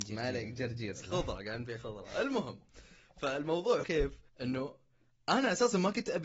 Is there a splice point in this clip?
yes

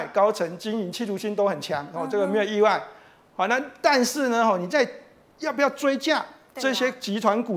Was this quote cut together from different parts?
no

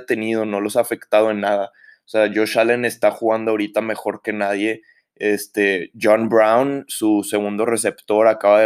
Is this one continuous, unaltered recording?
yes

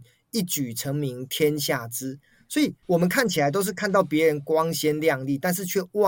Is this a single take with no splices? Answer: no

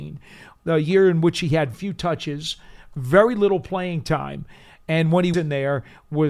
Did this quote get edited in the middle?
yes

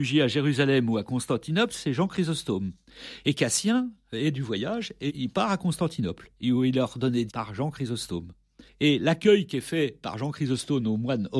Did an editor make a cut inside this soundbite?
yes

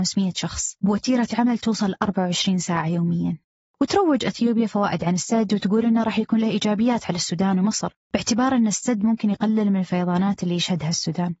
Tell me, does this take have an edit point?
no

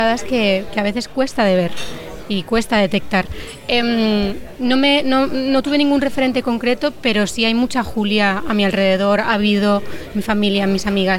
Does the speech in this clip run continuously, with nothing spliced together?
yes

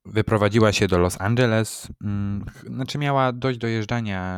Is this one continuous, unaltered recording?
yes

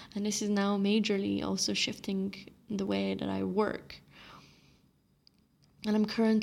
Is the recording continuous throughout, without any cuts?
yes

